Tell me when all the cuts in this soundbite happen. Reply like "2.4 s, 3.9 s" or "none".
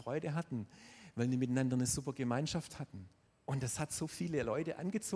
3.3 s